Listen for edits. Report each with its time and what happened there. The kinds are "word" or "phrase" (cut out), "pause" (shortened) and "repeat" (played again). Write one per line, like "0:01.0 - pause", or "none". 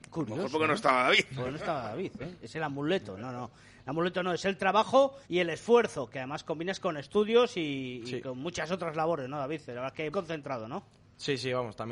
0:05.2 - pause
0:10.1 - phrase

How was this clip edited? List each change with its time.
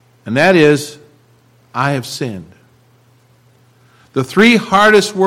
none

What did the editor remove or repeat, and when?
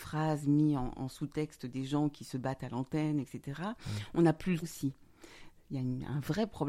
0:00.9 - word
0:04.6 - word

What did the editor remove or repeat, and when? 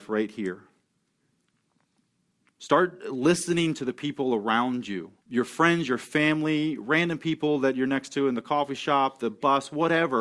0:05.2 - pause

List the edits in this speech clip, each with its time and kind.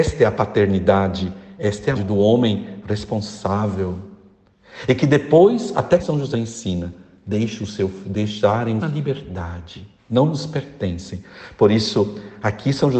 0:01.9 - word
0:06.0 - phrase
0:06.3 - word
0:08.8 - phrase

